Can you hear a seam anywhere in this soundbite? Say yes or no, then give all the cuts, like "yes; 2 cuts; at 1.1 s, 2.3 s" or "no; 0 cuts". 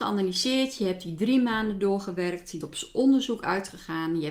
yes; 1 cut; at 2.6 s